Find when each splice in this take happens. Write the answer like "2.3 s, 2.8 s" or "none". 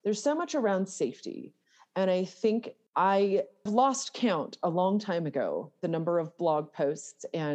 3.7 s